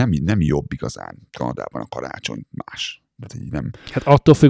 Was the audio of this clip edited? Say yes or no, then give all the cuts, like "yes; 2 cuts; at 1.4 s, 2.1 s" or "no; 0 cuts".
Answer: no; 0 cuts